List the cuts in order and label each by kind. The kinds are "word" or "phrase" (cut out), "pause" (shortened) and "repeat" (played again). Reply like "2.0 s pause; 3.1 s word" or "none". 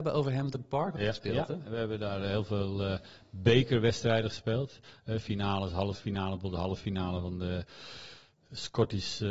1.0 s phrase